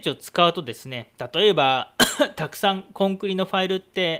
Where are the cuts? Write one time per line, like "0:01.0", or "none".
0:01.1